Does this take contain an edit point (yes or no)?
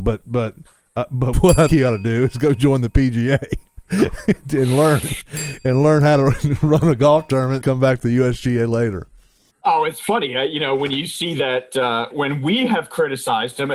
yes